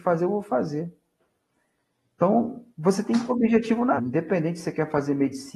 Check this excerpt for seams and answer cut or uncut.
cut